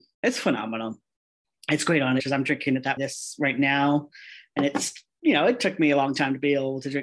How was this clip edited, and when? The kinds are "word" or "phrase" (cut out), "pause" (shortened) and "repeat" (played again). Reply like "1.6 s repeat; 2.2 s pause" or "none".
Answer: 2.2 s phrase; 3.0 s word